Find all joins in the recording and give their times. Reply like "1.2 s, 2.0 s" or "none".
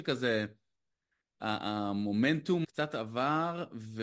2.6 s